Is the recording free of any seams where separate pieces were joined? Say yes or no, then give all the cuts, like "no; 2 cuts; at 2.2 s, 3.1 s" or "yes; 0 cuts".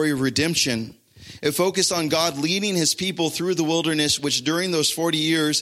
yes; 0 cuts